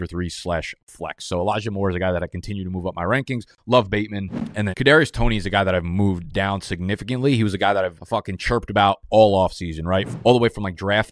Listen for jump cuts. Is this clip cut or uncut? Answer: cut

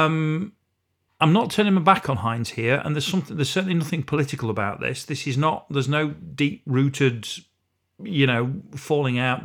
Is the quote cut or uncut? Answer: cut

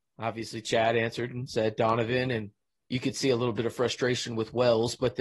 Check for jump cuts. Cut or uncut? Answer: uncut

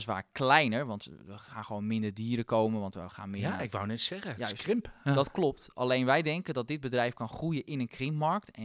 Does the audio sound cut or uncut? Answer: uncut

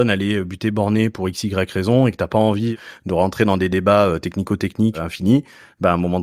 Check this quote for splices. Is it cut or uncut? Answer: uncut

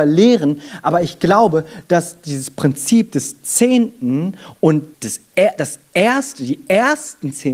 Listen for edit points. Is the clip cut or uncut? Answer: cut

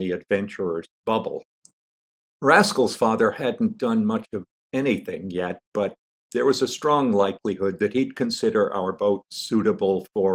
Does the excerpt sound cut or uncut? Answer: cut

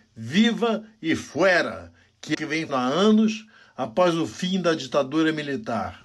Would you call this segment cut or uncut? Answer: cut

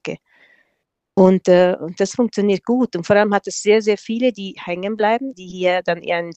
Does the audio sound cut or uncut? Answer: cut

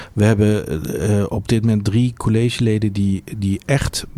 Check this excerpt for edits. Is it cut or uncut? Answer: uncut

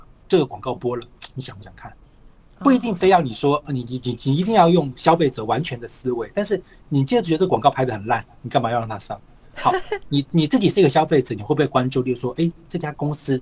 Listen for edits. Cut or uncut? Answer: uncut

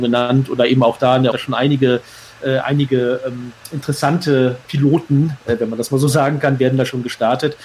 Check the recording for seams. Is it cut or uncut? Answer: cut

